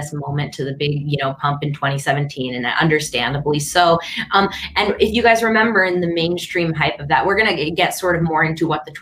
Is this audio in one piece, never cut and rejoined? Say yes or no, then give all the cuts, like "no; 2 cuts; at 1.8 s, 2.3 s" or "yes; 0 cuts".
yes; 0 cuts